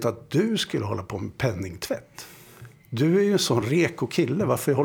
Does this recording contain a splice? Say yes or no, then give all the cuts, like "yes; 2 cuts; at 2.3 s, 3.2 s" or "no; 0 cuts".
no; 0 cuts